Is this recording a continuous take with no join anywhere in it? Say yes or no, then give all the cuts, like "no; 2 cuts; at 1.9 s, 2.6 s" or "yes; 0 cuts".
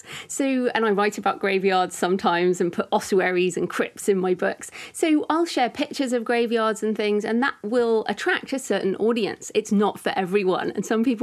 yes; 0 cuts